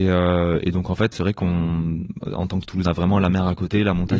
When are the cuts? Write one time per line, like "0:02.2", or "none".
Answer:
0:01.1
0:02.8